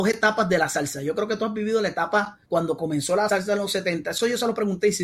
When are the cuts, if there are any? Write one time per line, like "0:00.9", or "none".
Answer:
0:02.4
0:03.3